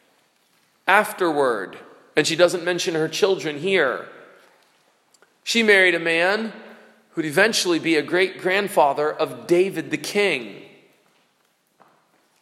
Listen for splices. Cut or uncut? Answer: uncut